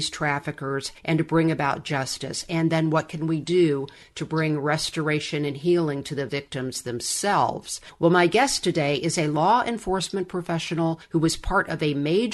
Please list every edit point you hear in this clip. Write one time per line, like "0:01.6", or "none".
none